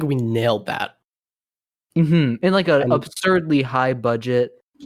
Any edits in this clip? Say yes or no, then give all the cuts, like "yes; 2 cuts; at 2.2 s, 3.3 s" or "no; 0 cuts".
no; 0 cuts